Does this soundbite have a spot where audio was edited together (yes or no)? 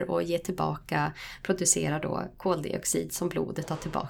no